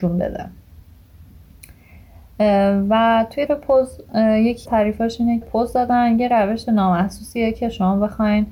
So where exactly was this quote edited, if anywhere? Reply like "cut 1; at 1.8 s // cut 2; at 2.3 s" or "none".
cut 1; at 3.5 s // cut 2; at 4.7 s // cut 3; at 5.4 s